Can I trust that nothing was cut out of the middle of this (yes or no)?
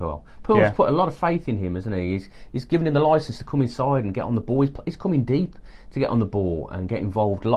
yes